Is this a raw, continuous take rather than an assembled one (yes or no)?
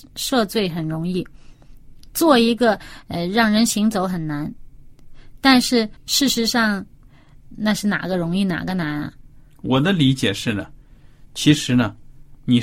no